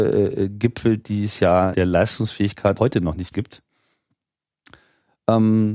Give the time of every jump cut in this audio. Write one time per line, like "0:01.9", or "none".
0:01.7
0:02.8
0:03.3